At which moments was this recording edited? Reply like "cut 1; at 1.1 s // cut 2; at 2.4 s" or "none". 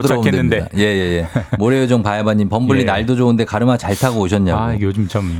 none